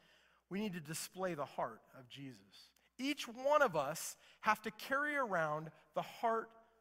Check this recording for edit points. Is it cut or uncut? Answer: uncut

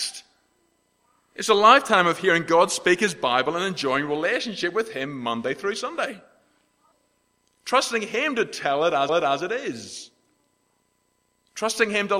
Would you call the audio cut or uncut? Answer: cut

